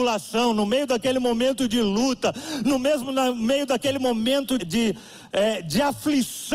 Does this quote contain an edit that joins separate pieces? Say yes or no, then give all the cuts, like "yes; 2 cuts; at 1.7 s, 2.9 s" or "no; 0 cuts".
yes; 1 cut; at 4.6 s